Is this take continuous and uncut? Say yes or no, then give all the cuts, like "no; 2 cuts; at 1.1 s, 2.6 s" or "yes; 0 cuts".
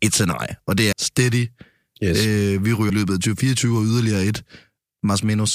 no; 2 cuts; at 0.9 s, 2.9 s